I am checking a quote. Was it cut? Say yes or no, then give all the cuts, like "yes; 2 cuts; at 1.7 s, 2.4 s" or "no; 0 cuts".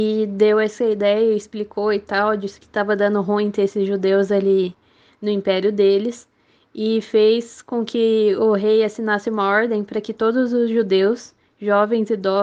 no; 0 cuts